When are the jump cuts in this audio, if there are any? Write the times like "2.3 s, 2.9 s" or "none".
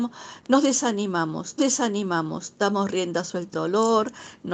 1.6 s, 3.5 s